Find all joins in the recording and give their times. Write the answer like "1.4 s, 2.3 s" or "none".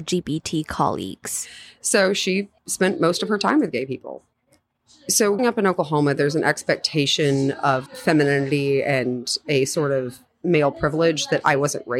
2.6 s, 5.4 s, 7.9 s